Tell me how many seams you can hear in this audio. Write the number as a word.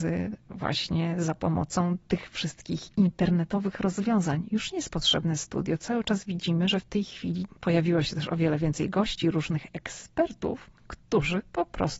one